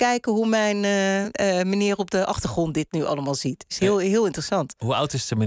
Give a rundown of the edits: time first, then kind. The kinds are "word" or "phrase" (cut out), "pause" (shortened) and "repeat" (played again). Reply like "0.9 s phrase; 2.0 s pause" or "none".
none